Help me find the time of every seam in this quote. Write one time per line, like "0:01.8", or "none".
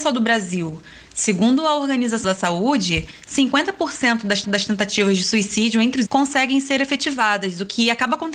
0:02.2
0:04.4
0:06.0